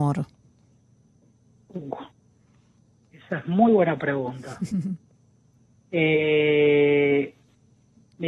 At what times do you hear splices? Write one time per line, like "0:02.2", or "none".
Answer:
none